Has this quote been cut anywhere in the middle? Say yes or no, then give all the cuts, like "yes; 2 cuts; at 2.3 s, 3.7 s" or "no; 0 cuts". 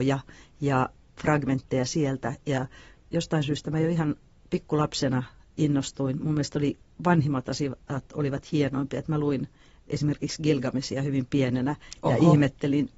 no; 0 cuts